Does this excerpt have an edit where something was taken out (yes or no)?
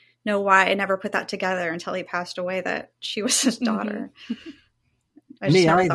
no